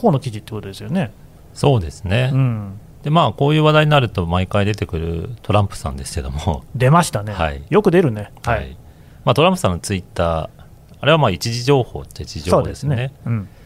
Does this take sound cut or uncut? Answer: uncut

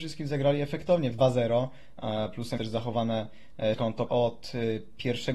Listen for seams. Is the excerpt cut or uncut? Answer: cut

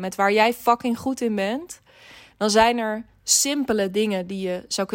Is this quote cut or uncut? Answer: uncut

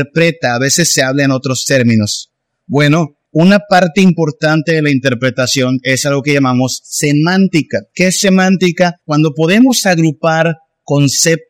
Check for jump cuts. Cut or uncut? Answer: cut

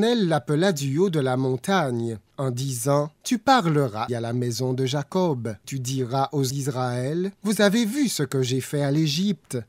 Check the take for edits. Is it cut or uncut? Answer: cut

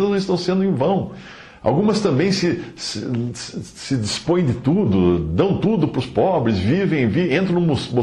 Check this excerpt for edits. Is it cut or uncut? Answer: uncut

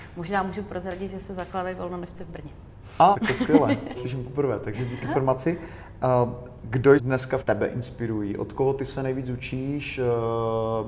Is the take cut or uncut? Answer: cut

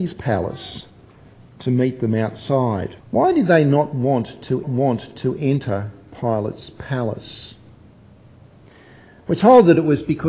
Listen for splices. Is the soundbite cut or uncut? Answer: cut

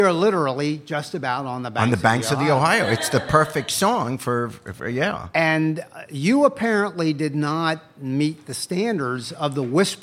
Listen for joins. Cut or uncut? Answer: uncut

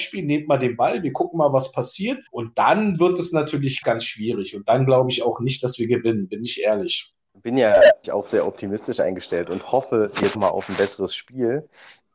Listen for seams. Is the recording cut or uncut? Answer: cut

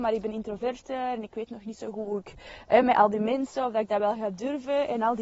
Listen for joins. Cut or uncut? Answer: uncut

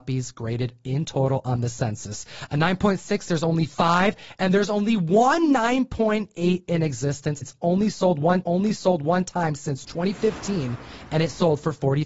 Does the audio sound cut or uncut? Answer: cut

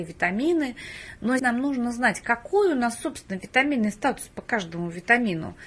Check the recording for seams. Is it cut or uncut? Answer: cut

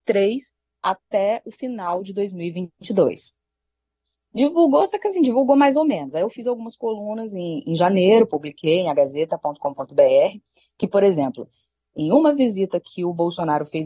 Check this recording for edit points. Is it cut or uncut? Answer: uncut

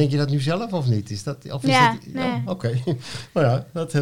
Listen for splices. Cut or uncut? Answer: uncut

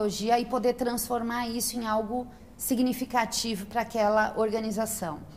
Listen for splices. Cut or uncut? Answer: uncut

